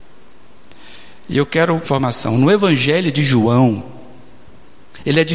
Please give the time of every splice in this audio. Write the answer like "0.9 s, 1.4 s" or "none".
1.8 s